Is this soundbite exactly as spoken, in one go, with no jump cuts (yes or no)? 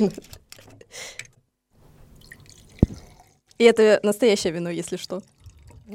yes